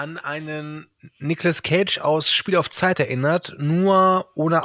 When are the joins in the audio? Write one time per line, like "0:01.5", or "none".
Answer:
none